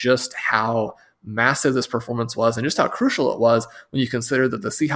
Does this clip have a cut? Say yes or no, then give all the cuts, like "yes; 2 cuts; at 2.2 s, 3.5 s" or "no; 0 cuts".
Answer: no; 0 cuts